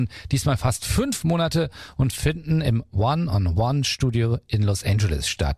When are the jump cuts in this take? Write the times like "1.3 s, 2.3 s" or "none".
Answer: none